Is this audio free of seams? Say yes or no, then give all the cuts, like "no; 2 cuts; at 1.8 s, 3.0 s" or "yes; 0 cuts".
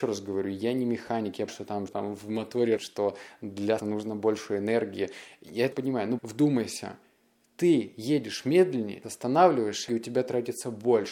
no; 8 cuts; at 1.5 s, 1.9 s, 2.8 s, 3.8 s, 5.7 s, 6.2 s, 9.0 s, 9.9 s